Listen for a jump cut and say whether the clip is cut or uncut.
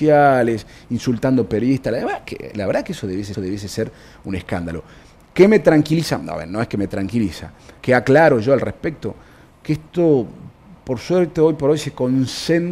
cut